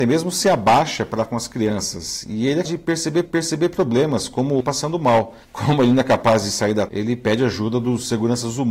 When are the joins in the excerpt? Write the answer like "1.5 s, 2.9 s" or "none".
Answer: 1.2 s, 2.6 s, 3.2 s, 4.6 s, 5.4 s, 6.9 s